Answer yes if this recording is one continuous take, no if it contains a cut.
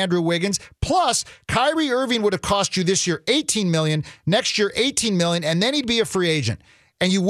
yes